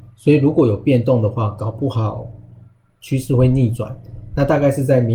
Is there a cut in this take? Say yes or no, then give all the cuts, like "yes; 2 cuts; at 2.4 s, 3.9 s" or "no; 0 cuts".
no; 0 cuts